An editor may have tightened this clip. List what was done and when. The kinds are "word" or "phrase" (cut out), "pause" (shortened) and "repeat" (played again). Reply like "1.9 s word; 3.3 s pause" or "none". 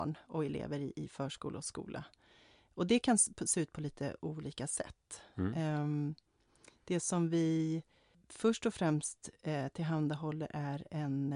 none